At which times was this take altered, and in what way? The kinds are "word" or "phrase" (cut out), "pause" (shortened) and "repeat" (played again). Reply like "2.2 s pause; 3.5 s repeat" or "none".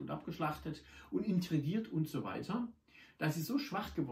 none